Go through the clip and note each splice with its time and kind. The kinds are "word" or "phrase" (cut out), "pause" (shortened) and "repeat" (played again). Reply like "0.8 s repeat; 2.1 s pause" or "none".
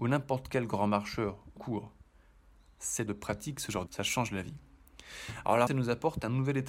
1.6 s word; 3.1 s word; 3.9 s word; 5.7 s word